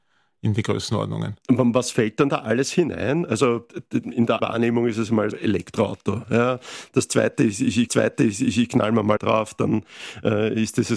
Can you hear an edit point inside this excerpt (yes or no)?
yes